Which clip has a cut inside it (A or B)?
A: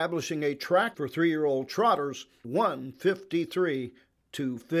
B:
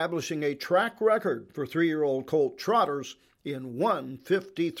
A